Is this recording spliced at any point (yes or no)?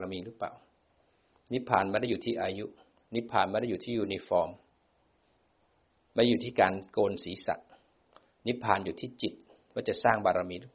no